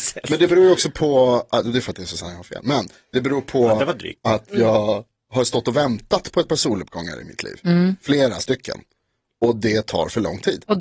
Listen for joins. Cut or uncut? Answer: uncut